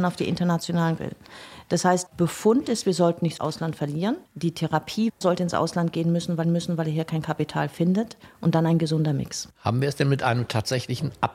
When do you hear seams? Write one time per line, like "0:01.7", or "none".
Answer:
0:01.0
0:02.1
0:03.4
0:04.3
0:05.2
0:06.4